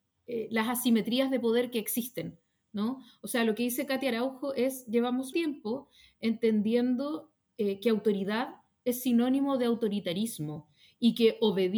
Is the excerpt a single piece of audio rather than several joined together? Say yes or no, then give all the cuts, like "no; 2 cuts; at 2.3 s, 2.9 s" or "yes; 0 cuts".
no; 1 cut; at 5.3 s